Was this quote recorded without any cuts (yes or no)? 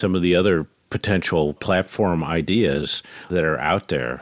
no